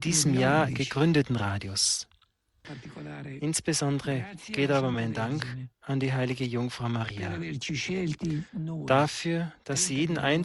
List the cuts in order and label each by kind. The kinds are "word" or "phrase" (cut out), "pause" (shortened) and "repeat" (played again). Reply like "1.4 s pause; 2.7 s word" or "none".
none